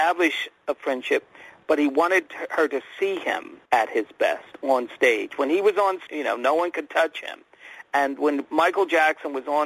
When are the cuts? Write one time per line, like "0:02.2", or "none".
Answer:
0:02.2
0:03.7
0:06.1